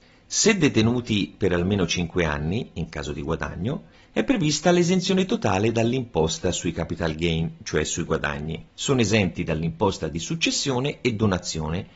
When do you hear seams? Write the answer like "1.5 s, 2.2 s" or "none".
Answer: 8.7 s